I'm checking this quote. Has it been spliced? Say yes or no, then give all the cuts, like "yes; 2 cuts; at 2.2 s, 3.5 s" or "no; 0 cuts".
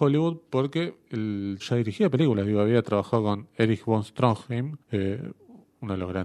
yes; 2 cuts; at 1.6 s, 4.8 s